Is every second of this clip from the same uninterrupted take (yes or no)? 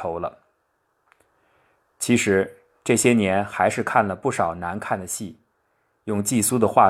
yes